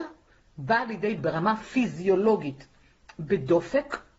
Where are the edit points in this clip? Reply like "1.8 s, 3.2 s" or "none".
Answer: 1.2 s